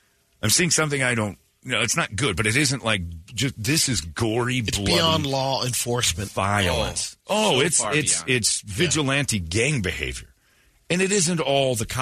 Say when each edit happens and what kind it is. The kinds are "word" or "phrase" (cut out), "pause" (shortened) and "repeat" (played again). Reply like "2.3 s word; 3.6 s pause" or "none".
none